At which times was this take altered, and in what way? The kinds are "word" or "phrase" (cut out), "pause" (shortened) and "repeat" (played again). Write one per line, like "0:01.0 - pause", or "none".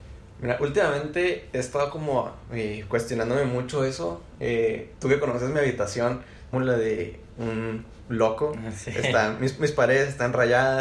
0:06.5 - phrase